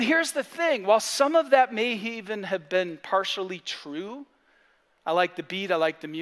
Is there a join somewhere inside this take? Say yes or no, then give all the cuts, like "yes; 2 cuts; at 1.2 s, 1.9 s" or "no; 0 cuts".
no; 0 cuts